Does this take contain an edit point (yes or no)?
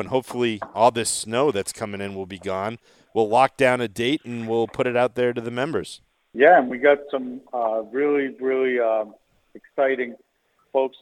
no